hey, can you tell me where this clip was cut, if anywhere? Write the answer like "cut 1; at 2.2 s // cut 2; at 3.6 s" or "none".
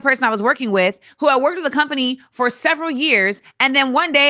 none